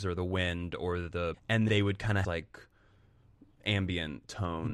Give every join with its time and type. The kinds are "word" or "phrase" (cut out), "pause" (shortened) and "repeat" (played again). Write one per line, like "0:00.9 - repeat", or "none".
0:01.3 - word
0:01.7 - word
0:02.2 - phrase